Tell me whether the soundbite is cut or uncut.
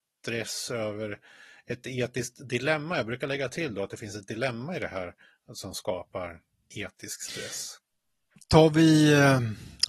uncut